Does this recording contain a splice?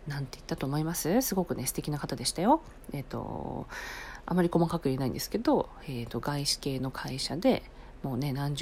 no; 0 cuts

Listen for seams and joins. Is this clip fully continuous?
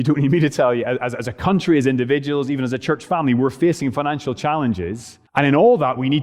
no; 1 cut; at 5.3 s

